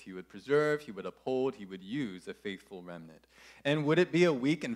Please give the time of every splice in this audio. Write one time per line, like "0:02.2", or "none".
none

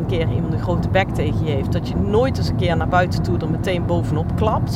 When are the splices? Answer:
none

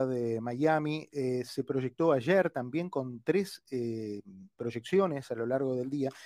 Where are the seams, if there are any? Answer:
none

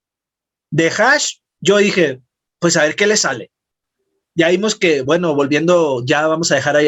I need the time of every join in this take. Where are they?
none

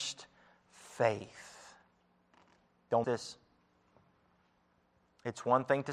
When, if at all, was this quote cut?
0:03.0

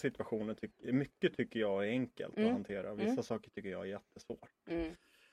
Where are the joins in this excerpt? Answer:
none

